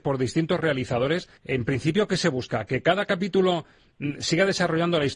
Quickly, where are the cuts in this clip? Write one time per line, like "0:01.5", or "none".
0:01.4